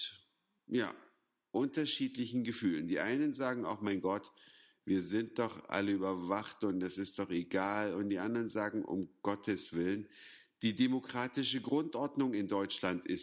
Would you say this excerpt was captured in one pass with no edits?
yes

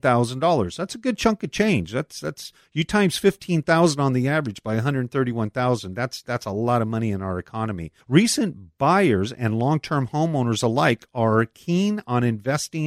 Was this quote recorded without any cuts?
no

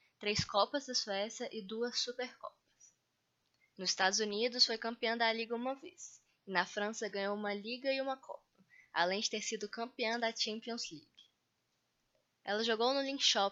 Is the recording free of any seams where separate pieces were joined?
yes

